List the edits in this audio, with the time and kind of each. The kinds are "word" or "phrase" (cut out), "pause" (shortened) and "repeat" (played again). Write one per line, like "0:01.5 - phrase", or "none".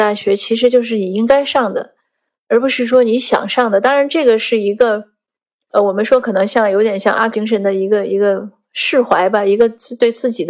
0:07.3 - word